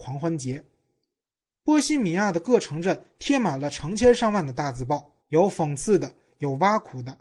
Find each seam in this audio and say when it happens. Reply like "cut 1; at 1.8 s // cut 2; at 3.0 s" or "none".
cut 1; at 5.2 s